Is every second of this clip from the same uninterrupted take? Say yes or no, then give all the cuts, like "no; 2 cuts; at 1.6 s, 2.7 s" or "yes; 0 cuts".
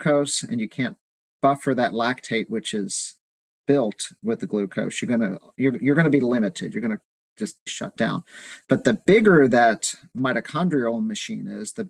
no; 1 cut; at 7.7 s